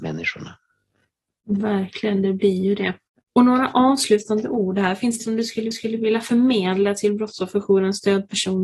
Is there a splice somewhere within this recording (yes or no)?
yes